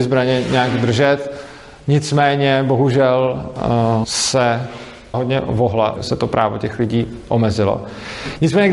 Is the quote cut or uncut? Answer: cut